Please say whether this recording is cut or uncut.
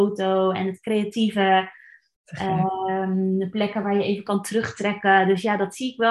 uncut